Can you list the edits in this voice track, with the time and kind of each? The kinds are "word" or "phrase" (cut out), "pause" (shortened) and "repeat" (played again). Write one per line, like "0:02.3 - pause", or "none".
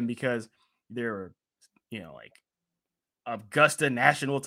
none